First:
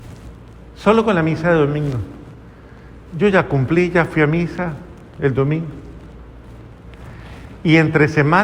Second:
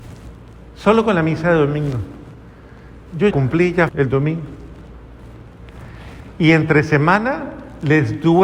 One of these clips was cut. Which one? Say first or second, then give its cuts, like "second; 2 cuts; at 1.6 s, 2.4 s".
second; 2 cuts; at 3.3 s, 3.9 s